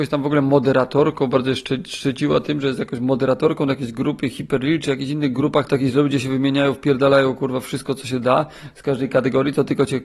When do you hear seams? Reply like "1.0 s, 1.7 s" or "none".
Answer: 5.7 s